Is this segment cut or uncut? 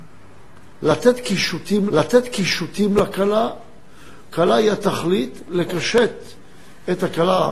cut